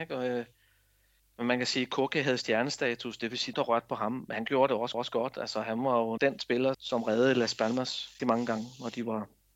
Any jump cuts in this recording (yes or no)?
yes